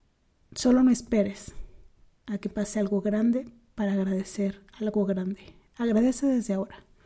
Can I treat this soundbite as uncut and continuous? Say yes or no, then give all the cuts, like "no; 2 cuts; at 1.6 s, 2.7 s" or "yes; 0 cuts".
yes; 0 cuts